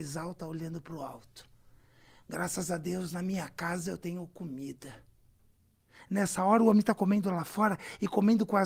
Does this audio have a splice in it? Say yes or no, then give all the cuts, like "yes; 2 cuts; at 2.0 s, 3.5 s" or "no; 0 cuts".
no; 0 cuts